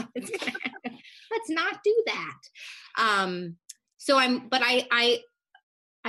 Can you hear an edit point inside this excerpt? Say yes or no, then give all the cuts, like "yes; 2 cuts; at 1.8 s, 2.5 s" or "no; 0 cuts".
no; 0 cuts